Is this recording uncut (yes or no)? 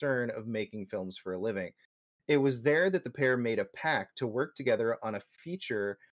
yes